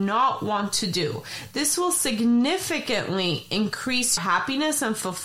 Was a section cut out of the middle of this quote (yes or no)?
yes